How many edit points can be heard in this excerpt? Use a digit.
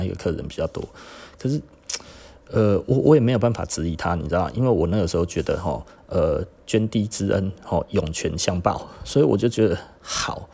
0